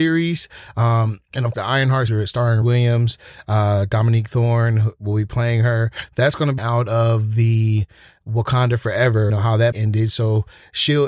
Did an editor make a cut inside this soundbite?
yes; 6 cuts; at 1.5 s, 2.1 s, 2.6 s, 6.6 s, 9.3 s, 9.7 s

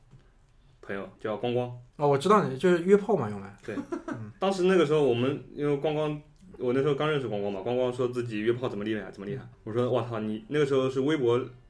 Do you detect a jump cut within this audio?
yes; 2 cuts; at 1.2 s, 9.5 s

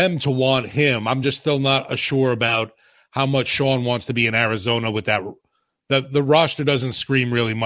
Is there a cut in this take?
no; 0 cuts

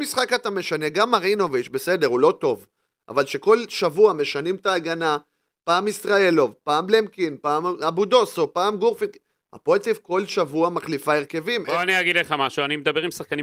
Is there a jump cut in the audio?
no; 0 cuts

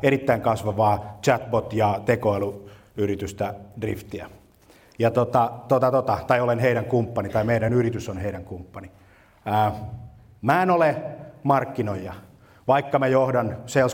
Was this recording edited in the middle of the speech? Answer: no; 0 cuts

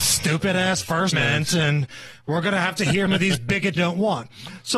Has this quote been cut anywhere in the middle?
yes; 3 cuts; at 1.1 s, 3.1 s, 3.8 s

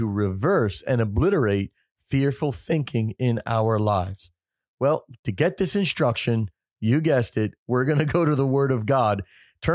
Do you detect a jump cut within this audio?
no; 0 cuts

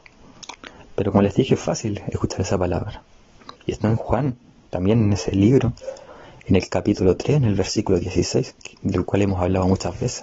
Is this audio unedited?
no; 2 cuts; at 3.6 s, 8.7 s

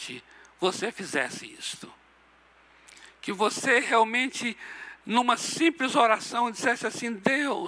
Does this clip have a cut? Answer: no; 0 cuts

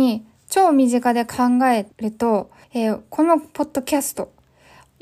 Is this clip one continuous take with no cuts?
no; 2 cuts; at 1.9 s, 2.6 s

